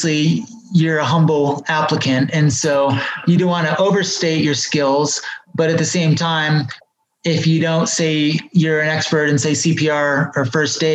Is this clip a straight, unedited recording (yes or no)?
yes